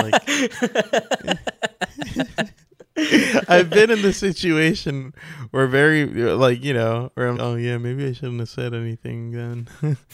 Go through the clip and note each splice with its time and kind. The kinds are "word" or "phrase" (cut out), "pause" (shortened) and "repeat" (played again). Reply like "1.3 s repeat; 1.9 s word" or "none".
7.3 s word

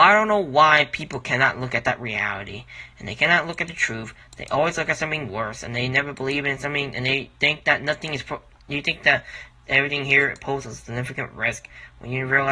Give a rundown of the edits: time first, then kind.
none

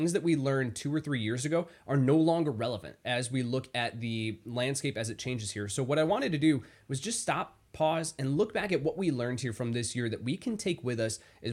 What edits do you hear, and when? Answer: none

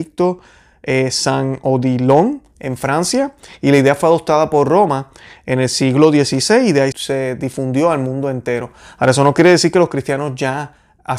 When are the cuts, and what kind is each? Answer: 6.9 s word

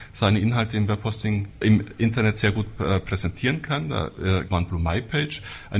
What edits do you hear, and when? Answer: 1.6 s word; 4.5 s phrase

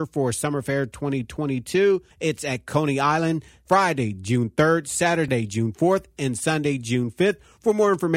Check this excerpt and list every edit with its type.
2.1 s pause

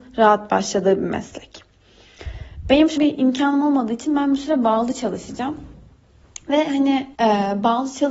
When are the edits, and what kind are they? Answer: 3.0 s word; 7.1 s pause

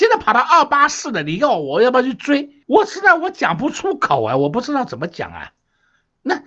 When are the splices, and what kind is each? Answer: 2.6 s pause

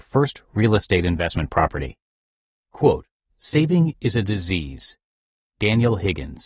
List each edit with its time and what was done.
none

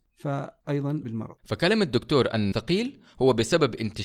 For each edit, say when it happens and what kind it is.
1.0 s word; 1.4 s pause; 2.5 s word

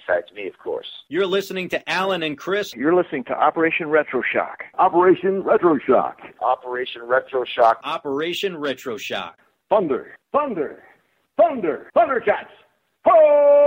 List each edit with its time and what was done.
10.2 s pause; 11.9 s pause

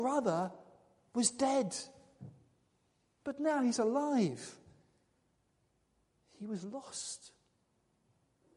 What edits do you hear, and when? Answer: none

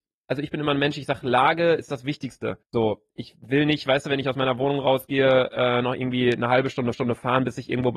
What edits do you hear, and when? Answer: 2.6 s pause; 6.9 s repeat

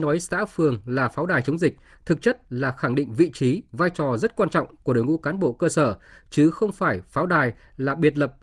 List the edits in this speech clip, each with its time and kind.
none

